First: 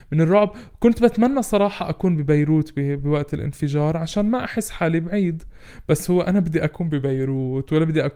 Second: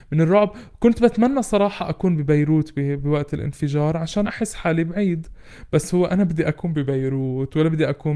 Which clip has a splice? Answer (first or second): second